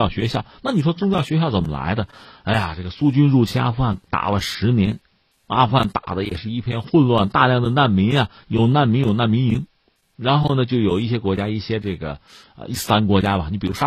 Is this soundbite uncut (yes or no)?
yes